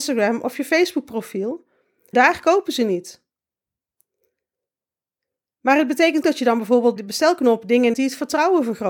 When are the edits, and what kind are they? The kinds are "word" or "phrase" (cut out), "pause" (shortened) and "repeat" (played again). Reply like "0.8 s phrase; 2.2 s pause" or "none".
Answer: 2.1 s word; 6.2 s word; 7.0 s word; 7.9 s word